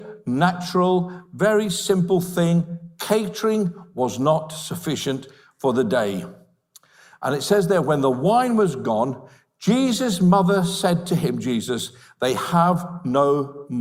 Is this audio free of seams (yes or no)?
yes